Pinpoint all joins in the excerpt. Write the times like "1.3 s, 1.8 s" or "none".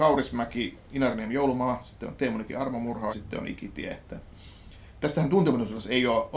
3.1 s